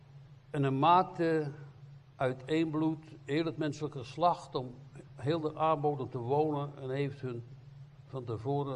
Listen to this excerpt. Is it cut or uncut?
uncut